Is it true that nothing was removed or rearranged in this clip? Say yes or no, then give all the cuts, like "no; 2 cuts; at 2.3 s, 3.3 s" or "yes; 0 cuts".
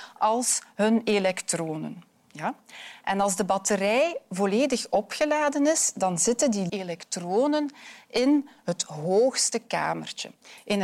no; 1 cut; at 6.7 s